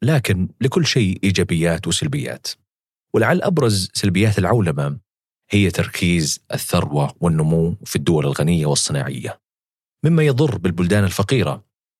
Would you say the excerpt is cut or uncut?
uncut